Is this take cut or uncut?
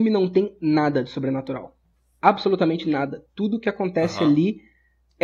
cut